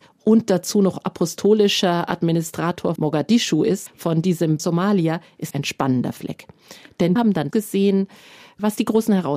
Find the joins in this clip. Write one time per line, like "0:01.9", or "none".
0:03.0
0:03.9
0:04.6
0:05.5
0:07.2
0:07.5